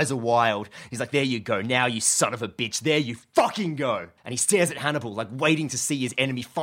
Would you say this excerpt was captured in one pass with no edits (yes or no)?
no